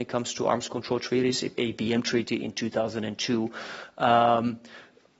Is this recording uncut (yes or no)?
no